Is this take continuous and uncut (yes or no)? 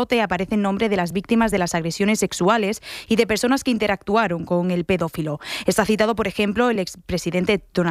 yes